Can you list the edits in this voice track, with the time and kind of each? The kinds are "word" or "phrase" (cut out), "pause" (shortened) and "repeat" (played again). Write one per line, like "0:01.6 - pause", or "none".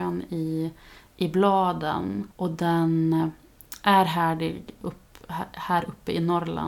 0:02.3 - pause